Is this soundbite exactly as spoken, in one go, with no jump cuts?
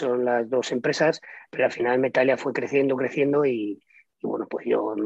yes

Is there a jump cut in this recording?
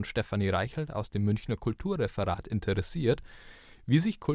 no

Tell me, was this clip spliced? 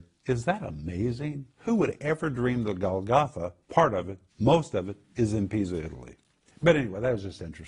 yes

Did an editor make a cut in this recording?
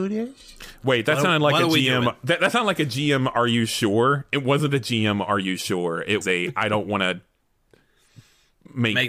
yes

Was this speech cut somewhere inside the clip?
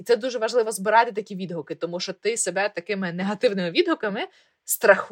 no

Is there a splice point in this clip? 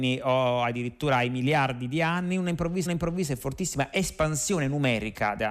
yes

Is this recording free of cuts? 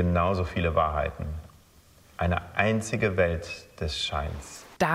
yes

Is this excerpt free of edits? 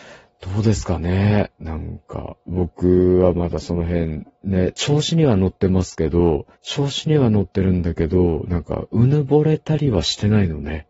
no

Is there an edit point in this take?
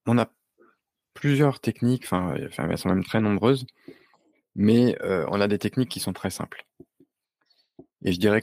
no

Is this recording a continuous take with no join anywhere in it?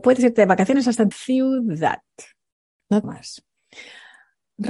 no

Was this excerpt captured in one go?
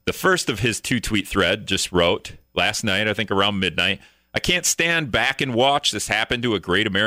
yes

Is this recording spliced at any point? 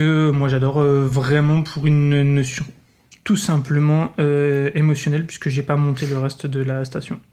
no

